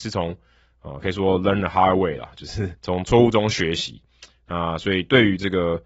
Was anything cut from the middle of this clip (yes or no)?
yes